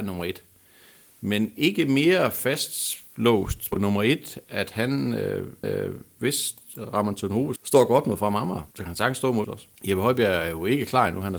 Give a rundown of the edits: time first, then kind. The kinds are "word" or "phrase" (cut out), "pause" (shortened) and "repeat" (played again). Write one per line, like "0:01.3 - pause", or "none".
0:03.7 - word
0:05.6 - repeat
0:07.6 - word
0:08.7 - pause
0:09.4 - word
0:09.8 - pause

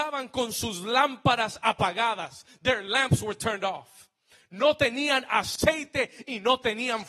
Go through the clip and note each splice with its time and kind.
none

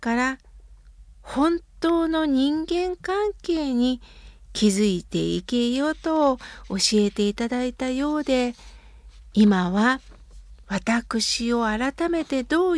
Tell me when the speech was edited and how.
none

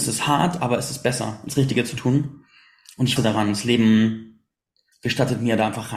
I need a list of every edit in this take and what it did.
0:01.5 - word
0:03.2 - word

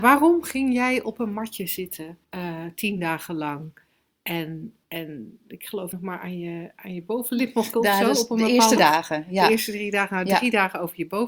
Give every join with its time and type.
0:02.2 - pause
0:04.8 - pause
0:05.9 - phrase
0:07.7 - word
0:08.8 - word

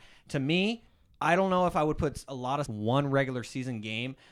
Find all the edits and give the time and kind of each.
0:02.7 - phrase

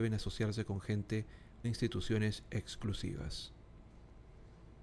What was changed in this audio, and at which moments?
0:01.6 - word

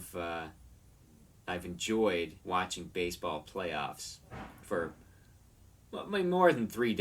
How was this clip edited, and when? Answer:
0:02.4 - pause

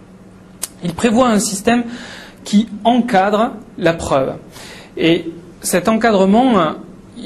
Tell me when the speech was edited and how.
0:05.5 - pause

